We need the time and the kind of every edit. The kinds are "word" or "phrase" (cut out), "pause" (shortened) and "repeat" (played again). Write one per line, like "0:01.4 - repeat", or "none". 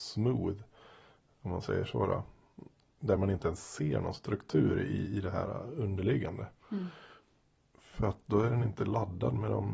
none